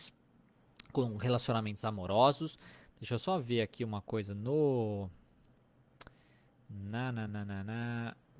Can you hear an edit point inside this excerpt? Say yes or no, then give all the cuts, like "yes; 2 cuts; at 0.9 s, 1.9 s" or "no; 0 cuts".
no; 0 cuts